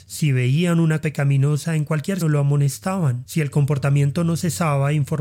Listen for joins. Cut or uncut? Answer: cut